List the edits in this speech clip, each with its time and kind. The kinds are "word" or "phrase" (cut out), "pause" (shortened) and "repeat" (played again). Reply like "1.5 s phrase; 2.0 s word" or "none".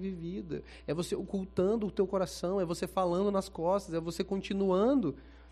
none